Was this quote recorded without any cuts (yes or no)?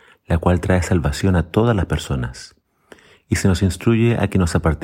yes